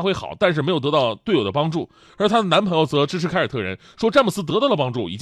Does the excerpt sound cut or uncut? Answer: uncut